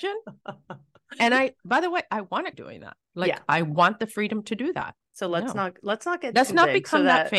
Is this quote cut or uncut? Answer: cut